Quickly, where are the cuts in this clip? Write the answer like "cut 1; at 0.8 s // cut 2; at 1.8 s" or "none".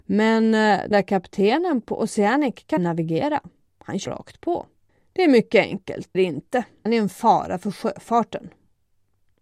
cut 1; at 0.9 s // cut 2; at 2.8 s // cut 3; at 4.0 s // cut 4; at 4.9 s // cut 5; at 6.1 s // cut 6; at 6.9 s